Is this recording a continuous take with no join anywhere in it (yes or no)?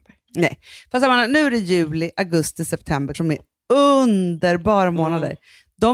no